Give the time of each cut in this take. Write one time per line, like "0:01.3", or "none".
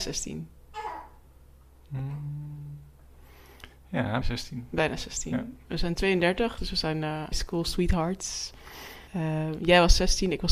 0:04.2
0:07.3
0:09.1